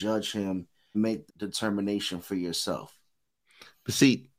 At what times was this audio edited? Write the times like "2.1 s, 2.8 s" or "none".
0.9 s, 1.3 s